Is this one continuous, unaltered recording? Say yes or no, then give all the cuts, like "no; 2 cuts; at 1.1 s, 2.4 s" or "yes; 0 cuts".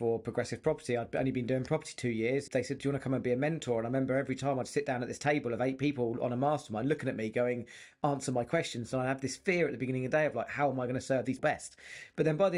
no; 2 cuts; at 2.5 s, 11.4 s